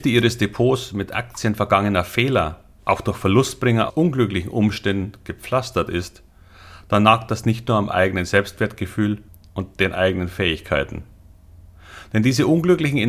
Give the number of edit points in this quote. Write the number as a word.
three